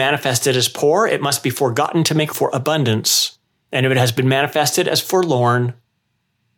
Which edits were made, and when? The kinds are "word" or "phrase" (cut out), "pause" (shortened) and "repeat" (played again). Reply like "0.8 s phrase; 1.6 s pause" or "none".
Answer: 2.3 s word; 3.6 s pause